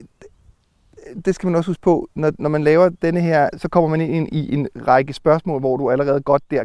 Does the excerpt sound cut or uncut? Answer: uncut